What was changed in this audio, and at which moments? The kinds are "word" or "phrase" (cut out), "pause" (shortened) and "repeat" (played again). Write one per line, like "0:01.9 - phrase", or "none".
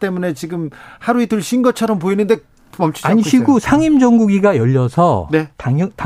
none